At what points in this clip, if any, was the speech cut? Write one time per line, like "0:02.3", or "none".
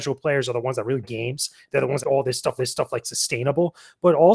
0:01.0
0:02.0
0:02.6